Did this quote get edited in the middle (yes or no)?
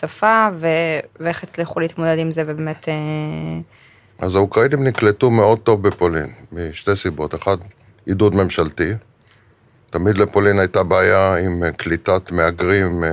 no